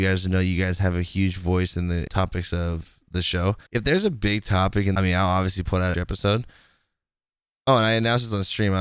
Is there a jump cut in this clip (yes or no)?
yes